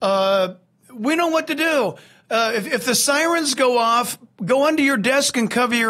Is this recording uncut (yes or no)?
yes